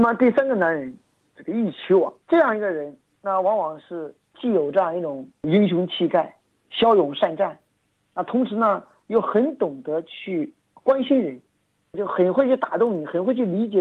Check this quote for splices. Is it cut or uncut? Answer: cut